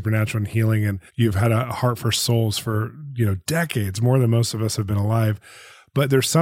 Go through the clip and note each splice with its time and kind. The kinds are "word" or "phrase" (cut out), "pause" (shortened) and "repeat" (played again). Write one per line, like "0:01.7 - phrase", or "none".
0:01.1 - pause